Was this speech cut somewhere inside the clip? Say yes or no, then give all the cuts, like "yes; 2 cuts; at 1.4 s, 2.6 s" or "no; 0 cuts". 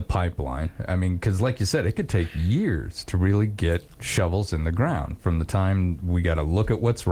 no; 0 cuts